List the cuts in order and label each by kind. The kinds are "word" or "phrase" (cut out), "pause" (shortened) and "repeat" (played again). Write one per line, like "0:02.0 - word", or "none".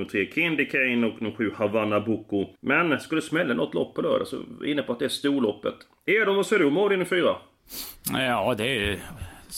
0:02.6 - pause